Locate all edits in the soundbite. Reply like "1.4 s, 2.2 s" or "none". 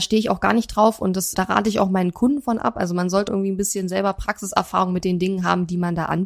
1.3 s, 3.3 s